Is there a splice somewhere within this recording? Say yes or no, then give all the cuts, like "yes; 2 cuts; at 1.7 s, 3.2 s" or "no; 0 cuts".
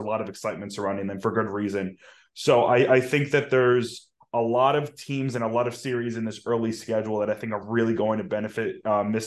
no; 0 cuts